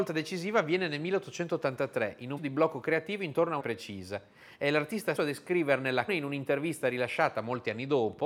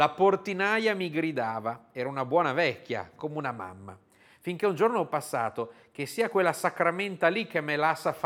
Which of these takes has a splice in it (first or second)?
first